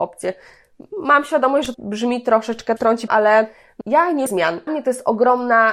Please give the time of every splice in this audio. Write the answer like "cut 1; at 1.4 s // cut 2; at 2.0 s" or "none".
cut 1; at 1.7 s // cut 2; at 2.8 s // cut 3; at 3.1 s // cut 4; at 3.8 s // cut 5; at 4.3 s // cut 6; at 4.7 s